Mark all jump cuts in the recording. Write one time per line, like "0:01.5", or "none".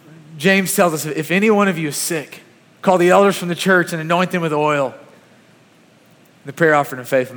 0:02.6